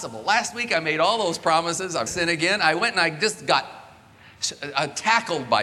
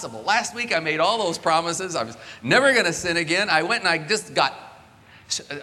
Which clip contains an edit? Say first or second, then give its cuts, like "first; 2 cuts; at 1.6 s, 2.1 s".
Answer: first; 1 cut; at 2.1 s